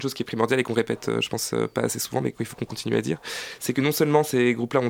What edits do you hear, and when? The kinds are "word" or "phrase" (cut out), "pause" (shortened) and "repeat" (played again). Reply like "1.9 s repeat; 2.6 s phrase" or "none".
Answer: none